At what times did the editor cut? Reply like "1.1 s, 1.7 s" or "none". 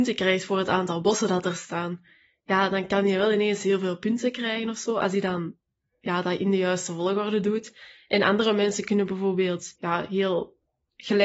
9.8 s